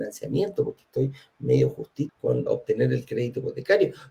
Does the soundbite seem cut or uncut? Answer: cut